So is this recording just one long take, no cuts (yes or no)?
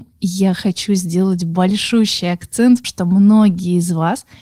no